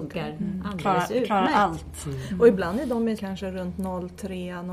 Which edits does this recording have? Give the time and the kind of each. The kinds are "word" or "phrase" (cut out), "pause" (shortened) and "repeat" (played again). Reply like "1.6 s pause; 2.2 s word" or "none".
3.2 s word